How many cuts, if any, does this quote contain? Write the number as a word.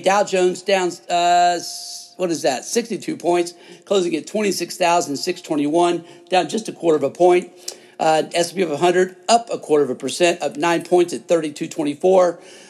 zero